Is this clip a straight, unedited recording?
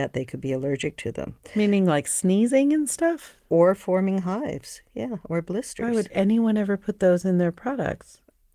yes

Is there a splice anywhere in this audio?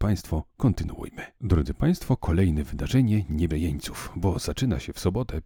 yes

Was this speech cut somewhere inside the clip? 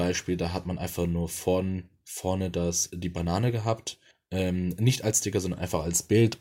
yes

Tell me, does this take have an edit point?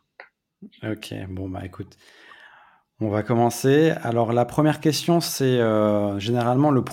no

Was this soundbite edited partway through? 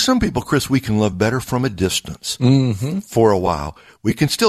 no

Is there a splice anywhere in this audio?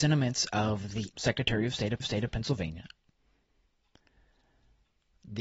yes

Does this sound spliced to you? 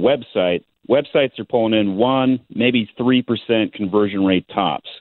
no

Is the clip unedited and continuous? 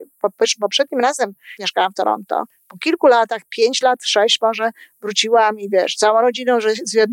no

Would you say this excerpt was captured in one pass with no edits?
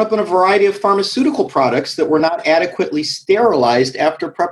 yes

